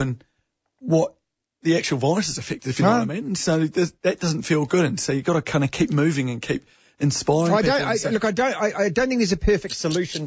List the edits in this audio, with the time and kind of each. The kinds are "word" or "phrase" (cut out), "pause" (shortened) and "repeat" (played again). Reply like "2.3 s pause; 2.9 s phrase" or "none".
none